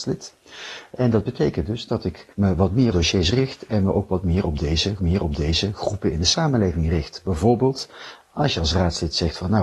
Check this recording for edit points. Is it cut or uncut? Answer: cut